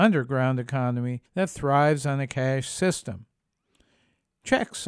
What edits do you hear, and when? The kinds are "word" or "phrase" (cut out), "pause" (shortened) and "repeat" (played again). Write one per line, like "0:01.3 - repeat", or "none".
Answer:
0:01.3 - pause